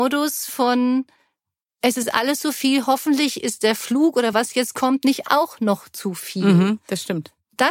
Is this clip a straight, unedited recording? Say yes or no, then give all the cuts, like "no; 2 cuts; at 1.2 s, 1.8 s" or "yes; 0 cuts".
yes; 0 cuts